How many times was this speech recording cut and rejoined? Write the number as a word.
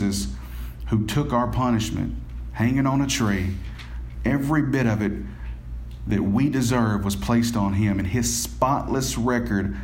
zero